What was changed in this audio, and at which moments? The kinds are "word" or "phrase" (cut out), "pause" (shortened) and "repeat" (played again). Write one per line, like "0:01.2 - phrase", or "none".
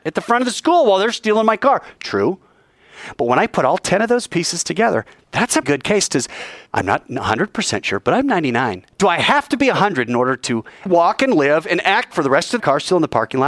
0:05.6 - word
0:06.7 - pause
0:08.9 - pause
0:10.9 - word
0:12.1 - word
0:12.6 - phrase